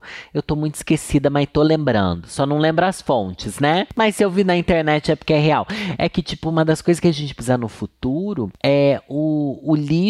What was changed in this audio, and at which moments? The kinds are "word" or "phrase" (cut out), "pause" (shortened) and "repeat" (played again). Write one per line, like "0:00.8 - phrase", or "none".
none